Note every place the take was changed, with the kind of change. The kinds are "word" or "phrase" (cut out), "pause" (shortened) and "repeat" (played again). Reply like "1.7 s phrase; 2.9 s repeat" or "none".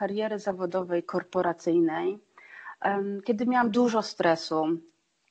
1.0 s word

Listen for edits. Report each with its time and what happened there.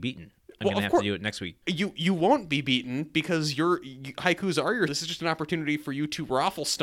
1.6 s pause; 4.9 s word

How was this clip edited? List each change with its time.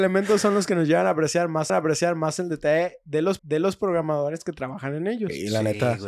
1.7 s repeat; 3.4 s repeat

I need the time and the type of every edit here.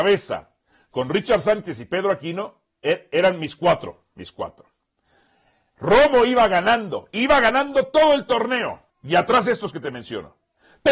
8.9 s pause

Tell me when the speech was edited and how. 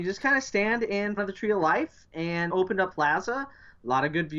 1.2 s word; 2.5 s word; 2.9 s word

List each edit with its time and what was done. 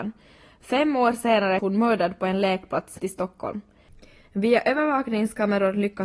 1.6 s word; 3.0 s word

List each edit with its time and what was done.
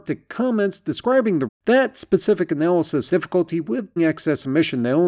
1.5 s word; 3.1 s word; 4.0 s word

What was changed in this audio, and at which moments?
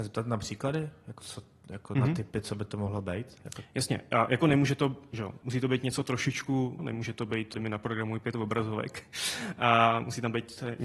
1.2 s word; 5.4 s word; 6.8 s word; 7.5 s phrase

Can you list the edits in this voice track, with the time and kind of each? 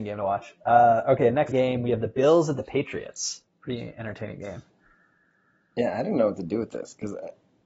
1.5 s word

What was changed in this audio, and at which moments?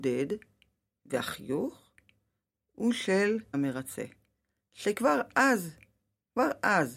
3.5 s word

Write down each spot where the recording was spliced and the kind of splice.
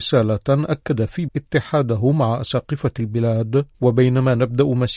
1.3 s word; 3.7 s pause

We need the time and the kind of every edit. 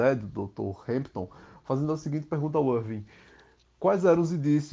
none

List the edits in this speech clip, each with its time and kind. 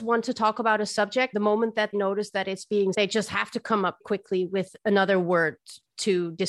1.3 s word; 1.9 s word; 2.9 s word; 4.0 s word

